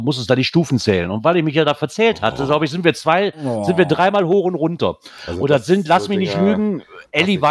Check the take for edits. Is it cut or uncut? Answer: uncut